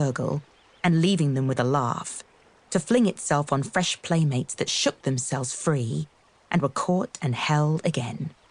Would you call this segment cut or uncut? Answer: uncut